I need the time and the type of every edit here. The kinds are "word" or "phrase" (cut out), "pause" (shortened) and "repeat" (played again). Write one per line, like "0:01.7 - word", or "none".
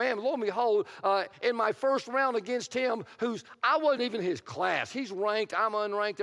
none